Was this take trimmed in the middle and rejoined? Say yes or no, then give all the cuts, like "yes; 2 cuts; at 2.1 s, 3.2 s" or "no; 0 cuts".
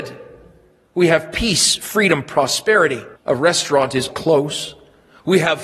yes; 2 cuts; at 3.1 s, 4.1 s